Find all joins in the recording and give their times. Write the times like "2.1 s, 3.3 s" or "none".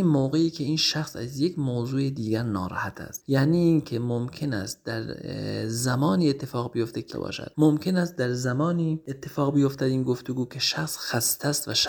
7.1 s